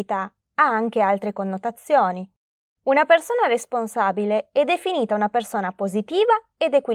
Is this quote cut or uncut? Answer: uncut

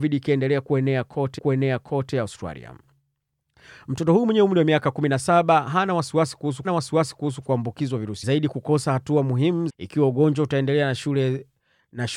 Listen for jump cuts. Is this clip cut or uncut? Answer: cut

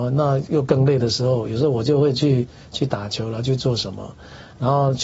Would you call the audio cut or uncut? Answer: uncut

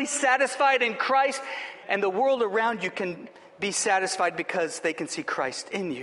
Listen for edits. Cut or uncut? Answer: uncut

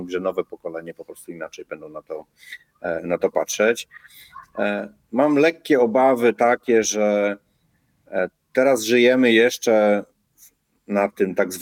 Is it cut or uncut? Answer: uncut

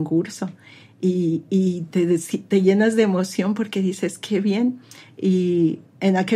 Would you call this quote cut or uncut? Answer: uncut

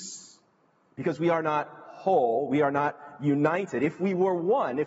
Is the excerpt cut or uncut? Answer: uncut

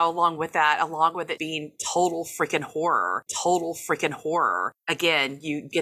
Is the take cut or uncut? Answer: cut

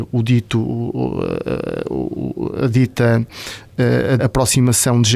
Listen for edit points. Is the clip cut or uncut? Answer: cut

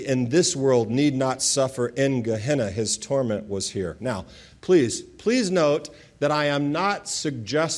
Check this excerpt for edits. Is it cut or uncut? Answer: uncut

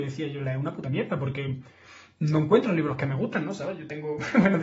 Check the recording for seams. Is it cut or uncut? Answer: uncut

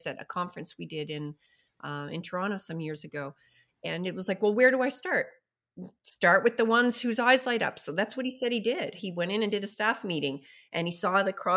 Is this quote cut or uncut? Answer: uncut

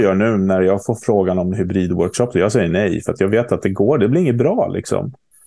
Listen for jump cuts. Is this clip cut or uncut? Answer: uncut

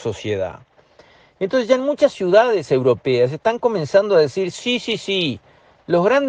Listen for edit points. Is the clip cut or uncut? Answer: uncut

